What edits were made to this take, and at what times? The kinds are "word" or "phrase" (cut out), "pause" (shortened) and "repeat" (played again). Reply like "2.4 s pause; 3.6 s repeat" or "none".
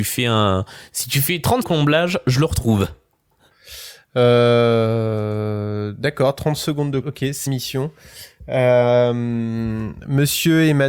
1.6 s phrase; 7.0 s word; 7.5 s word